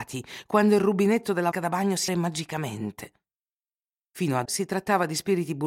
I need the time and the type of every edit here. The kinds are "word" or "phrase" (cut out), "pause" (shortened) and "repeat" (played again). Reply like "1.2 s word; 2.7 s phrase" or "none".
1.5 s word; 2.1 s word; 4.4 s word

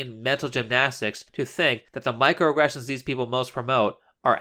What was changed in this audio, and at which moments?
1.3 s pause; 1.9 s pause

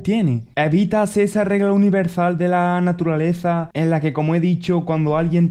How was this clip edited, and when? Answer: none

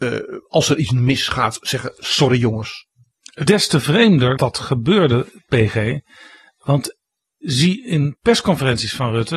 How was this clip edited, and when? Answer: 3.5 s word; 4.4 s word; 7.4 s word

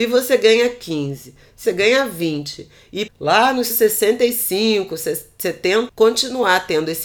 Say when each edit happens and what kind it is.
1.6 s word; 3.1 s word; 3.7 s word; 5.9 s word

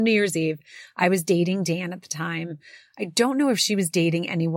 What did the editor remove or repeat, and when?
none

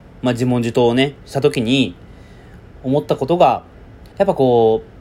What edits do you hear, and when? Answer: 4.1 s pause

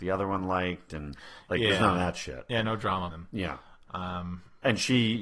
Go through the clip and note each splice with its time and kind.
3.1 s word

